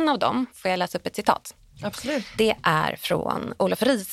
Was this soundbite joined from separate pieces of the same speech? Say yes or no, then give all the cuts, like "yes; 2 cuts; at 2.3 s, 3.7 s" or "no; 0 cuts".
no; 0 cuts